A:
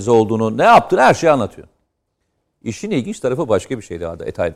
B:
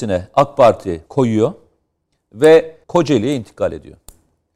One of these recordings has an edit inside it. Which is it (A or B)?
B